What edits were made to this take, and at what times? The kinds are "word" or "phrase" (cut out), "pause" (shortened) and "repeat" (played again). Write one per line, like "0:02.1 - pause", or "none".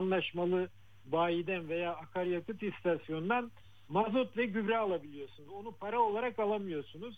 none